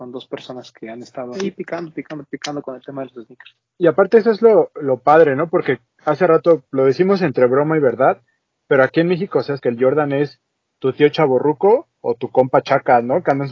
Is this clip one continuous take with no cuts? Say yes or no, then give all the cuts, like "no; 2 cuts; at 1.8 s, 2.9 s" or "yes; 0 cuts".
no; 4 cuts; at 1.4 s, 6.7 s, 9.6 s, 11.9 s